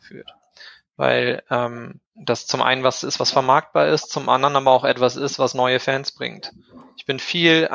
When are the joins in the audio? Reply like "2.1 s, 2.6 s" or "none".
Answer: 2.1 s